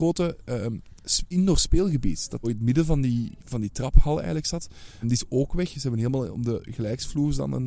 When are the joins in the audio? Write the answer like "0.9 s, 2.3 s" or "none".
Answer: 2.4 s, 5.0 s